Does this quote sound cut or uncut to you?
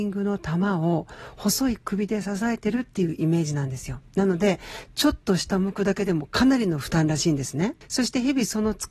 cut